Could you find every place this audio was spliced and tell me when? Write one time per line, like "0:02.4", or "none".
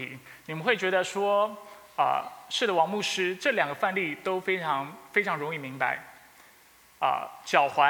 none